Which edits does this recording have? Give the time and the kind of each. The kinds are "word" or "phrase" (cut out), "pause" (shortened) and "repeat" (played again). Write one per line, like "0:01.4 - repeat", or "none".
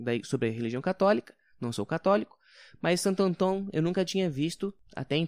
none